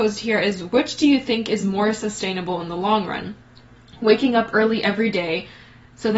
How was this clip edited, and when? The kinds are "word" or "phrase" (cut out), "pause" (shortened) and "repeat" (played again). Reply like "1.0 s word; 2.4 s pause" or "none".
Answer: none